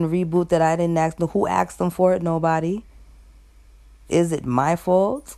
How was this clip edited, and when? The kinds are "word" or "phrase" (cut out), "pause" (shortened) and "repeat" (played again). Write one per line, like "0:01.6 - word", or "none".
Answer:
none